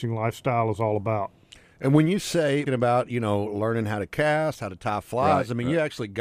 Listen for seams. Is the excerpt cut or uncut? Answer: cut